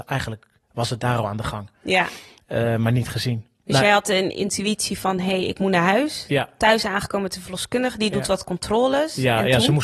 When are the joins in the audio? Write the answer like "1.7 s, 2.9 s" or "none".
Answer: none